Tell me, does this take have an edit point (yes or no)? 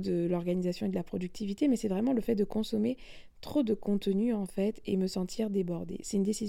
no